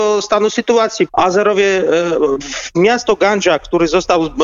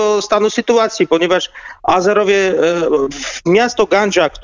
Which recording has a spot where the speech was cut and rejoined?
first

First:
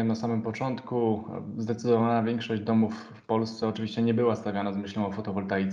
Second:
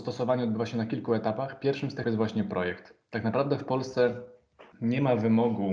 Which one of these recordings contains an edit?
second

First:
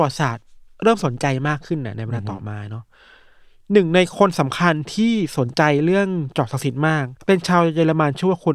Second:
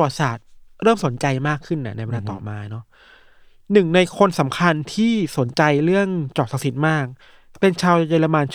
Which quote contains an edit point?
first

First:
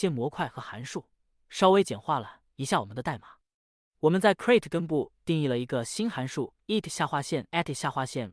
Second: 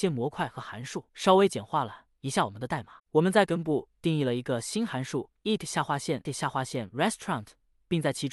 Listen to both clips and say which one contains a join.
second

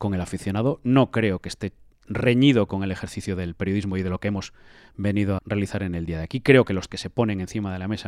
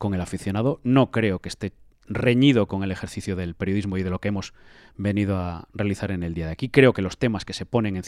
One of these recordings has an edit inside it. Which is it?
first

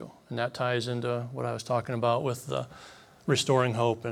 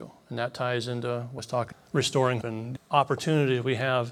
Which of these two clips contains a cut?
second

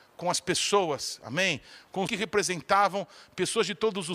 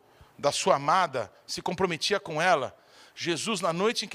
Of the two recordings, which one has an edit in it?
first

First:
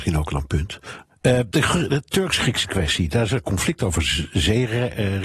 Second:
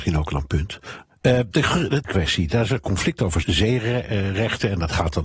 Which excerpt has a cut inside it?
second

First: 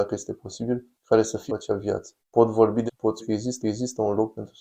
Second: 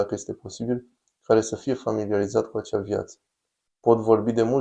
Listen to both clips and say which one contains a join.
first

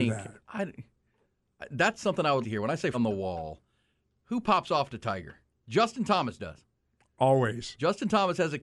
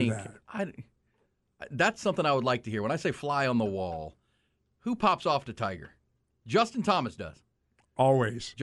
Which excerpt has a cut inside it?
first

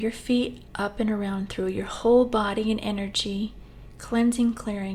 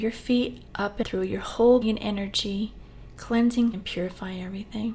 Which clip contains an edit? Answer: second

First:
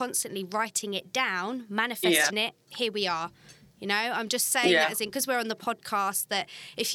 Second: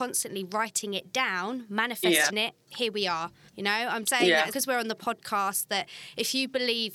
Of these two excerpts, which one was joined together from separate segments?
second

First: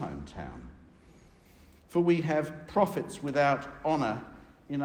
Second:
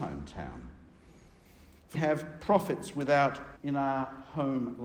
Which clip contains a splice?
second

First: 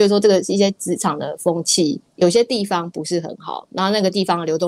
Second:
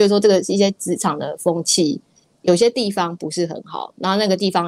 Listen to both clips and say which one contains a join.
first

